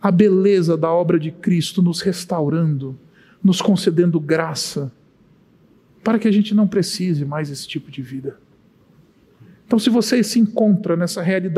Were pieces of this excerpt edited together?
no; 0 cuts

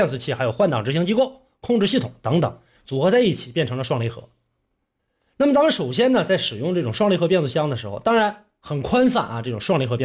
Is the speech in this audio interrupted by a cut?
no; 0 cuts

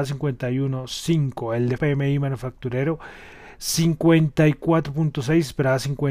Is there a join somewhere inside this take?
yes; 1 cut; at 1.8 s

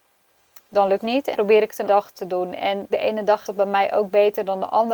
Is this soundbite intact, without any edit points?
no; 5 cuts; at 1.0 s, 1.3 s, 1.9 s, 2.9 s, 3.4 s

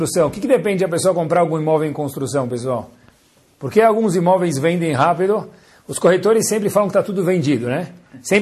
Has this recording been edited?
no; 0 cuts

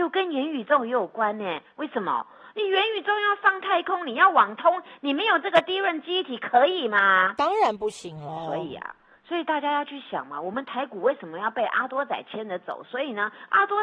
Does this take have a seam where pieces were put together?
no; 0 cuts

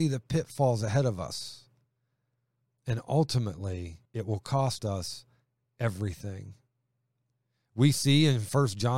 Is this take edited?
yes; 1 cut; at 4.1 s

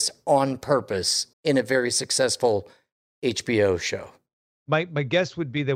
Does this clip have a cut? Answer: yes; 1 cut; at 1.3 s

